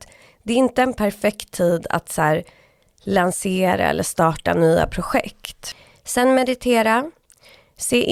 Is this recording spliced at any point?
no; 0 cuts

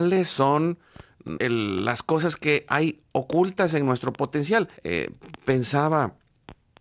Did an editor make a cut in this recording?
yes; 2 cuts; at 1.4 s, 4.8 s

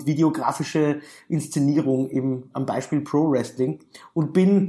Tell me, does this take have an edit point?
no; 0 cuts

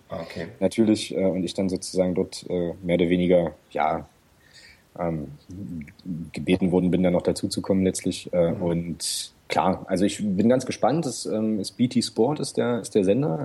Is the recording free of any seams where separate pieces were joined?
yes; 0 cuts

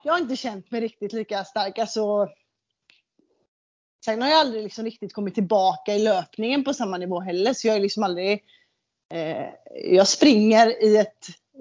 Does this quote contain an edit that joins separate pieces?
no; 0 cuts

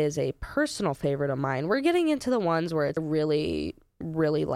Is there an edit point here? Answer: yes; 1 cut; at 3.0 s

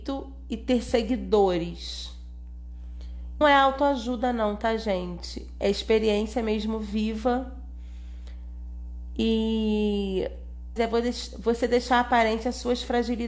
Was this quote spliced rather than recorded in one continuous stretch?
yes; 2 cuts; at 3.4 s, 10.8 s

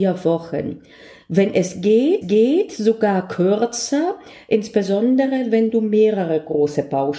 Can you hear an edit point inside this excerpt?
yes; 1 cut; at 2.2 s

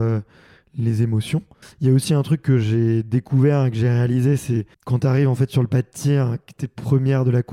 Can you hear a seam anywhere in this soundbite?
yes; 2 cuts; at 1.6 s, 4.7 s

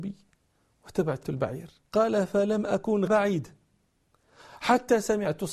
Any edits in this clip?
yes; 3 cuts; at 1.2 s, 1.8 s, 3.1 s

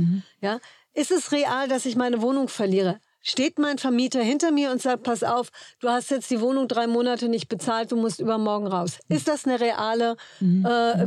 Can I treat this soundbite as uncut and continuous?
yes; 0 cuts

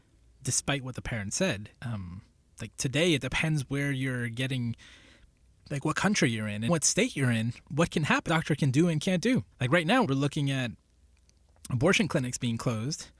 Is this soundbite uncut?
no; 6 cuts; at 1.8 s, 6.7 s, 7.6 s, 8.3 s, 9.5 s, 10.0 s

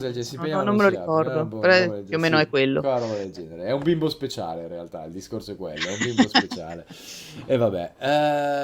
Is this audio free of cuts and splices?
yes; 0 cuts

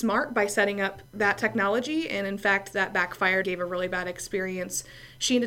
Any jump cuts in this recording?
yes; 2 cuts; at 1.1 s, 3.4 s

